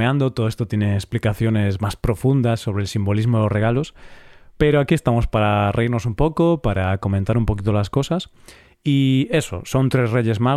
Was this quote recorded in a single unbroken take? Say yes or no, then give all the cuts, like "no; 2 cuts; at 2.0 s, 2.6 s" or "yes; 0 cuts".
yes; 0 cuts